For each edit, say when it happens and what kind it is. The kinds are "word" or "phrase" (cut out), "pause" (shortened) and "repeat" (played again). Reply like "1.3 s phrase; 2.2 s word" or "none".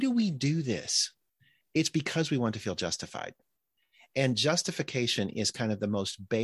none

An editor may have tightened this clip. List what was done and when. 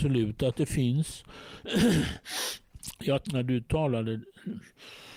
3.2 s word

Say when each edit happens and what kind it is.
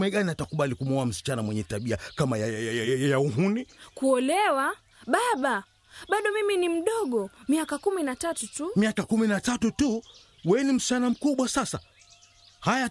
none

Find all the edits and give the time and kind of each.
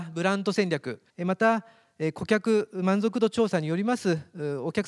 1.1 s pause

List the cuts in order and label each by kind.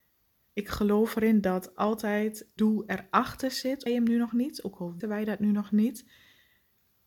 2.6 s word; 3.9 s phrase; 5.0 s word

